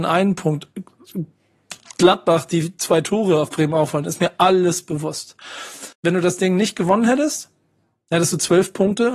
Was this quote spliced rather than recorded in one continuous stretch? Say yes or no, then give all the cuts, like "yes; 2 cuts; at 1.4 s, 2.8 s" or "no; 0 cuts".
yes; 1 cut; at 5.9 s